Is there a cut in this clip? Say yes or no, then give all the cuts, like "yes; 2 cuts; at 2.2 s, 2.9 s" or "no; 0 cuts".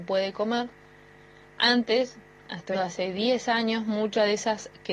yes; 1 cut; at 2.7 s